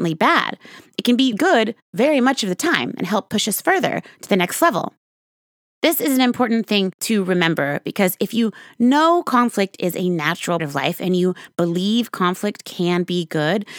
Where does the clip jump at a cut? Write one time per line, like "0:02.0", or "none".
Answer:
0:01.3
0:10.6